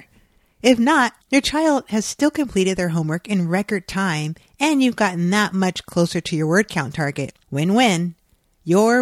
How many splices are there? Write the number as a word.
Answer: two